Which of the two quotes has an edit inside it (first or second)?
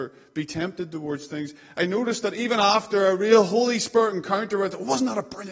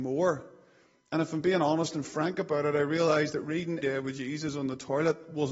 second